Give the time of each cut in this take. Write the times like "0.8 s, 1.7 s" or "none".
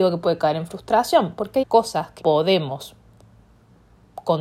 1.6 s, 2.2 s